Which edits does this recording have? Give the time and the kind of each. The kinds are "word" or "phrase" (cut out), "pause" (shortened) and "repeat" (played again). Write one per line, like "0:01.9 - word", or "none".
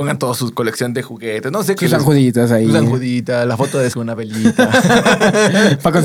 0:01.8 - word
0:03.9 - word